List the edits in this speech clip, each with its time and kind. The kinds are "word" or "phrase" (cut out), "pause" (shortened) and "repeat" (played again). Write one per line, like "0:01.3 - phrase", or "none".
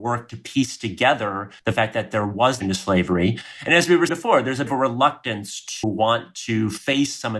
0:01.6 - pause
0:02.6 - phrase
0:04.1 - word
0:04.7 - word
0:05.8 - word